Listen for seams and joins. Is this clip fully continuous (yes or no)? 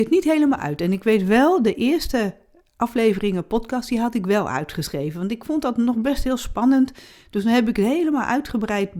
yes